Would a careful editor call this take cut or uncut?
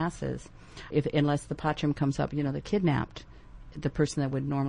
cut